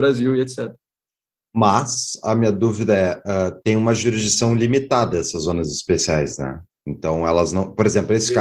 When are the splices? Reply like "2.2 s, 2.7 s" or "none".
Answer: none